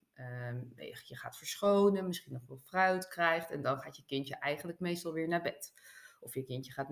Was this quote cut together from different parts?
no; 0 cuts

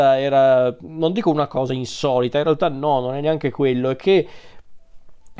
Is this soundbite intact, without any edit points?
yes; 0 cuts

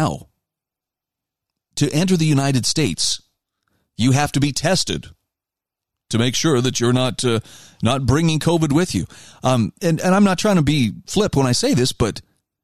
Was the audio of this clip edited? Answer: no; 0 cuts

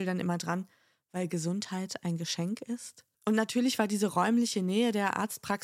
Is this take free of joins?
no; 1 cut; at 3.1 s

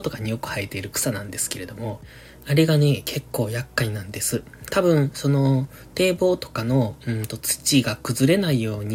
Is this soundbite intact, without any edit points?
yes; 0 cuts

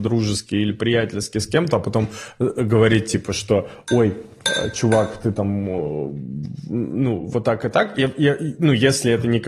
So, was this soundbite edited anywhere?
no; 0 cuts

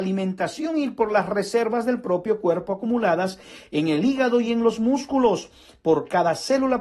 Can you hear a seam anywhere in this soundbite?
no; 0 cuts

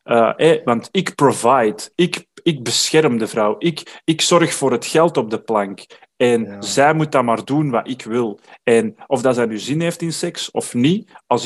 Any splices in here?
no; 0 cuts

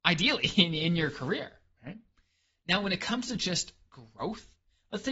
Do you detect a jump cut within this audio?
no; 0 cuts

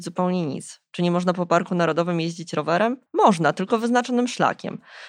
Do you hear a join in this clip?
yes; 1 cut; at 3.1 s

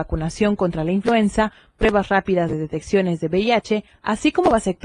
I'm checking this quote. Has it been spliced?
no; 0 cuts

